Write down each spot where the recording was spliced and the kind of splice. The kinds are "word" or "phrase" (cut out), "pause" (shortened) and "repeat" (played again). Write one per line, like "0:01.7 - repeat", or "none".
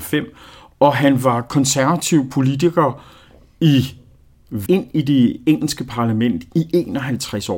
0:04.7 - word